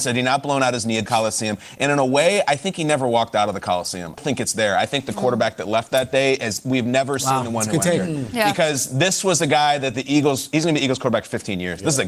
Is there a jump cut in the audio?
yes; 2 cuts; at 1.1 s, 4.2 s

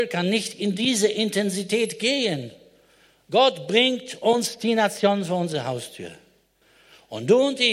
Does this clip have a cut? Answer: no; 0 cuts

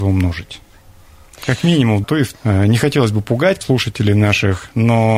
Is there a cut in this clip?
yes; 3 cuts; at 2.0 s, 2.3 s, 3.6 s

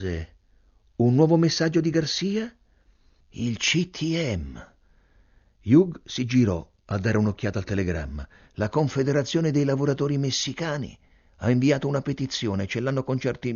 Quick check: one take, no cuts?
yes; 0 cuts

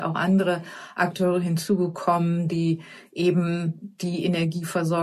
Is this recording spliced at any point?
no; 0 cuts

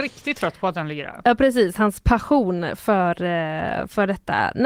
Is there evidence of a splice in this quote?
no; 0 cuts

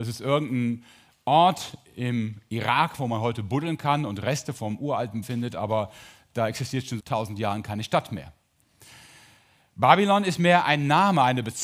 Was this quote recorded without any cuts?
no; 2 cuts; at 5.2 s, 7.0 s

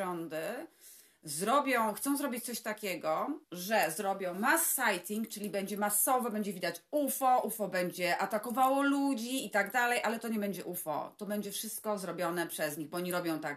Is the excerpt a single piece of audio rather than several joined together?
no; 1 cut; at 3.4 s

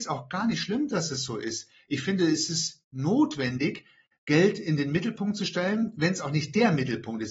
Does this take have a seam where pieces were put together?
no; 0 cuts

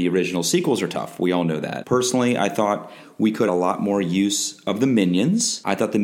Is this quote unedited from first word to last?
no; 1 cut; at 3.5 s

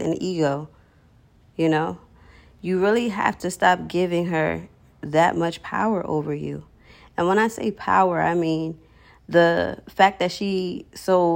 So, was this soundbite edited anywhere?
no; 0 cuts

